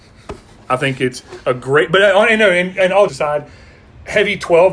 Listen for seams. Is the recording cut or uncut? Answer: cut